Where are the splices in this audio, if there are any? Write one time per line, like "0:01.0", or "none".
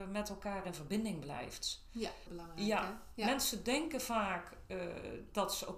0:02.3

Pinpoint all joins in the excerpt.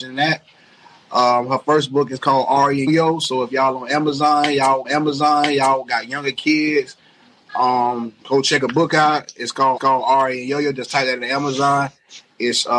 0:02.9
0:04.8
0:08.2
0:09.8

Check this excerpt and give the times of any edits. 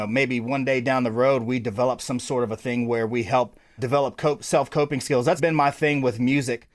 0:03.8
0:05.4

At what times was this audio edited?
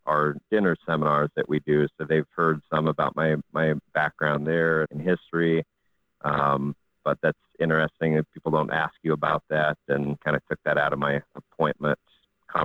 0:03.5
0:04.9
0:10.2

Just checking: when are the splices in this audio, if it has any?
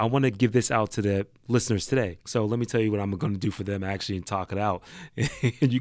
0:02.2

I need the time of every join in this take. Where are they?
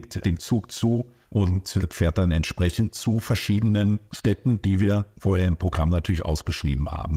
none

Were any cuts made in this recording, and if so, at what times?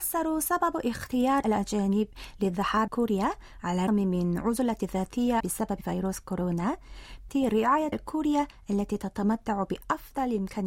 0:01.4
0:02.9
0:03.9
0:05.4
0:07.3
0:07.9

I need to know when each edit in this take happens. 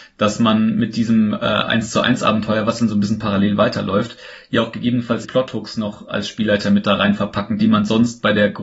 0:05.2
0:07.6

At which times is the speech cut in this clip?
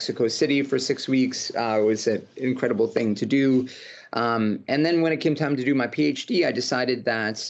none

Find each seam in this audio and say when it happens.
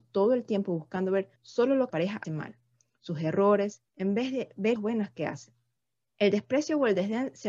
0:01.4
0:01.9
0:02.2
0:03.9
0:04.8
0:05.8

